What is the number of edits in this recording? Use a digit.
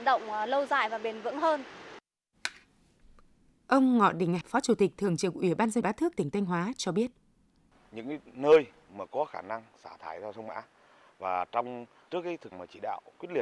4